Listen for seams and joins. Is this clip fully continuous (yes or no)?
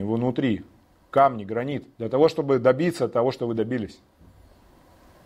no